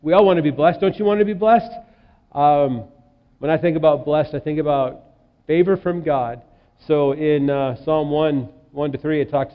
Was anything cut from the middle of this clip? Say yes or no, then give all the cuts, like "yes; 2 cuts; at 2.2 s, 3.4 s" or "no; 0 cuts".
no; 0 cuts